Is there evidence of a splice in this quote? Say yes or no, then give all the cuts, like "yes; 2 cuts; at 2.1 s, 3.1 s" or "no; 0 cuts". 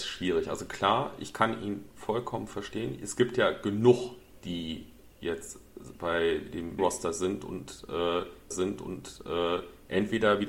yes; 2 cuts; at 6.8 s, 8.5 s